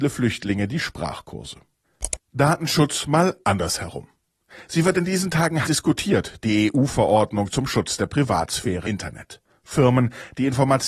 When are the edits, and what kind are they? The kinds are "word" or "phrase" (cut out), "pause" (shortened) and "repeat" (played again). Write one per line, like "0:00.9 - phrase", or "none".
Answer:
0:02.2 - pause
0:03.4 - pause
0:05.6 - word
0:08.8 - word